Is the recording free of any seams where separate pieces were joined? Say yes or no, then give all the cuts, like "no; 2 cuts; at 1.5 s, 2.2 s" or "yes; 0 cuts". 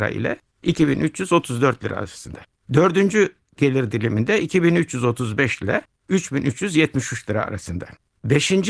yes; 0 cuts